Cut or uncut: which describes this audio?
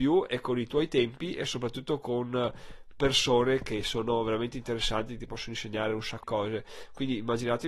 cut